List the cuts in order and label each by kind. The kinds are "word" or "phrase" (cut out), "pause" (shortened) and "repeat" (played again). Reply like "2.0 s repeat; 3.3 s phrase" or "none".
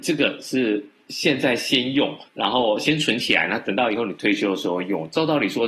2.3 s pause